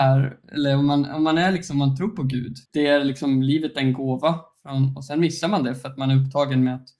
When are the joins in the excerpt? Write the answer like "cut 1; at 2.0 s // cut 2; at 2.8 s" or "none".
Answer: cut 1; at 2.7 s